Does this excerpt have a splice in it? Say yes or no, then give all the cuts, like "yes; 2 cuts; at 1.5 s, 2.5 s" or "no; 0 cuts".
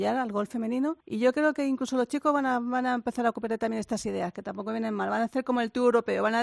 yes; 1 cut; at 1.0 s